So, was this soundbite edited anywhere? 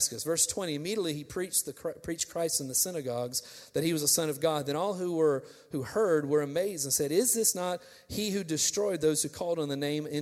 no; 0 cuts

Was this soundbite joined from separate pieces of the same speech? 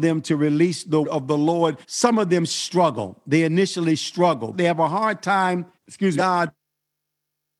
yes; 5 cuts; at 1.0 s, 1.8 s, 4.5 s, 5.7 s, 6.2 s

